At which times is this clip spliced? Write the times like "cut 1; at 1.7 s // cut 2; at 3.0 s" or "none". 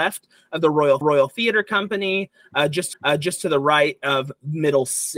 cut 1; at 1.0 s // cut 2; at 2.9 s